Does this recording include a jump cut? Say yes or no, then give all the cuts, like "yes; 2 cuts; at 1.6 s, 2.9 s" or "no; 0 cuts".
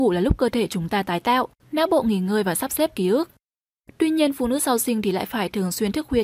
no; 0 cuts